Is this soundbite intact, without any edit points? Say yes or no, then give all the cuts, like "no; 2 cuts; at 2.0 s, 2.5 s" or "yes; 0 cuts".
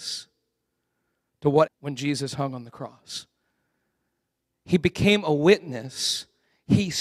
no; 1 cut; at 1.7 s